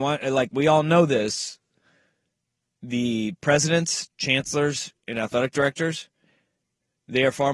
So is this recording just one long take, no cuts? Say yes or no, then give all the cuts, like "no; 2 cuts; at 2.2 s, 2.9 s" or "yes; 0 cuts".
yes; 0 cuts